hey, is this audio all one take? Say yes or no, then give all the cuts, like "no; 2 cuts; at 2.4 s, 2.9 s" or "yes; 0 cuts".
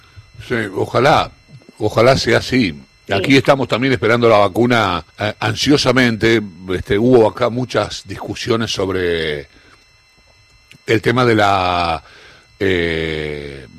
no; 1 cut; at 5.1 s